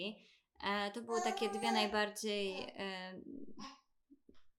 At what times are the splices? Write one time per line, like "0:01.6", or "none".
none